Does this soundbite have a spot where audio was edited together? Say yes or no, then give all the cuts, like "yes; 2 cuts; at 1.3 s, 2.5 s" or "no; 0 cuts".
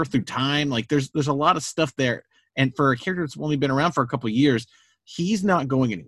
no; 0 cuts